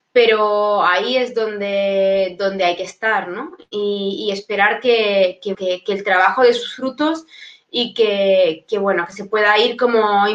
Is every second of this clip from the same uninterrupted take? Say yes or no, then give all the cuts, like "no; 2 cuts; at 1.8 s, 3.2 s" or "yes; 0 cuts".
no; 1 cut; at 5.5 s